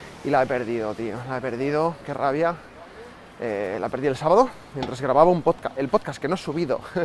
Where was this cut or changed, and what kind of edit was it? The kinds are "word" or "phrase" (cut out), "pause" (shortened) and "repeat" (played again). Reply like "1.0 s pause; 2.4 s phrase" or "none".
none